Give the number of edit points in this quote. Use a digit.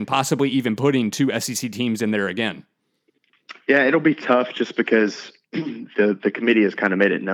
0